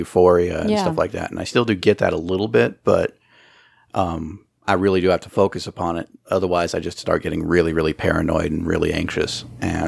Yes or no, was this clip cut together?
no